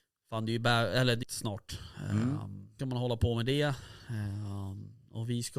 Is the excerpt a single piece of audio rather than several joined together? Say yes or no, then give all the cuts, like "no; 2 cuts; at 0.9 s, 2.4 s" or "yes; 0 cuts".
no; 2 cuts; at 1.2 s, 2.8 s